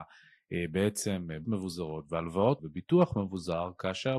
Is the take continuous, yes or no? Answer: no